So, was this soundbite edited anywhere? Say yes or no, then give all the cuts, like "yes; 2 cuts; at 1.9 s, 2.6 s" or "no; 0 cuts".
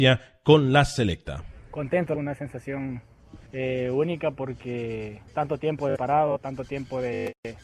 yes; 4 cuts; at 2.2 s, 3.5 s, 5.3 s, 6.0 s